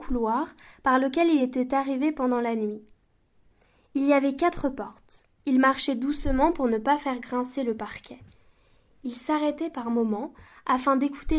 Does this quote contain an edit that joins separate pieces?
no; 0 cuts

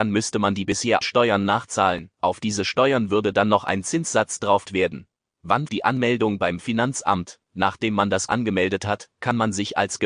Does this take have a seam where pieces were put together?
yes; 6 cuts; at 1.0 s, 2.1 s, 4.7 s, 5.7 s, 7.4 s, 8.3 s

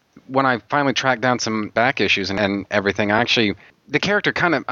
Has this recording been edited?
no; 0 cuts

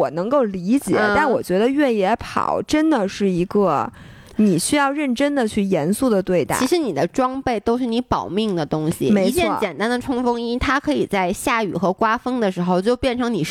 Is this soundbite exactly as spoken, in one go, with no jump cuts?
yes; 0 cuts

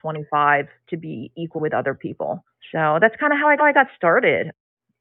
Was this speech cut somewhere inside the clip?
yes; 2 cuts; at 1.6 s, 3.6 s

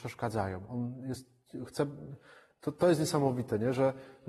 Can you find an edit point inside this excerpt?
no; 0 cuts

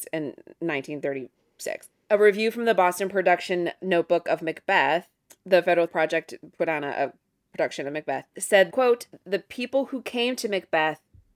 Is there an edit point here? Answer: yes; 2 cuts; at 5.9 s, 8.7 s

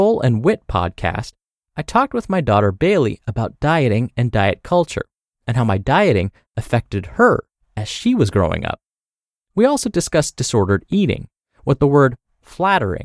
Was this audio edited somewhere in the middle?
no; 0 cuts

